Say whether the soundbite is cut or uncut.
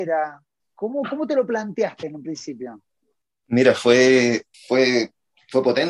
cut